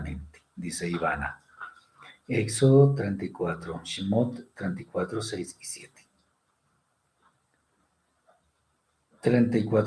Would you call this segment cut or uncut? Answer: uncut